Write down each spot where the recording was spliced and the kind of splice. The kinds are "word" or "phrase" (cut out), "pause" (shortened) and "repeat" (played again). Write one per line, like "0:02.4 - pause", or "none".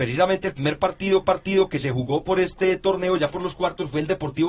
0:01.2 - repeat

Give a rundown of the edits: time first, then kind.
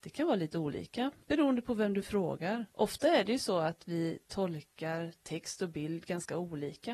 0:01.2 - pause
0:02.7 - pause

